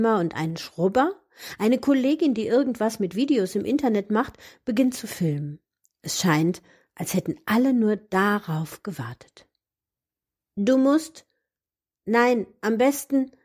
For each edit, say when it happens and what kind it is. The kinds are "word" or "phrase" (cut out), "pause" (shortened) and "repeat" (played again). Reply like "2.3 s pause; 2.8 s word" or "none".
none